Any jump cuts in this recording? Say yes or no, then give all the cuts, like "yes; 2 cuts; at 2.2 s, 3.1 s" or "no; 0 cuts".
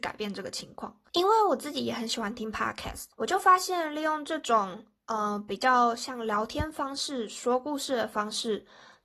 yes; 2 cuts; at 1.1 s, 3.1 s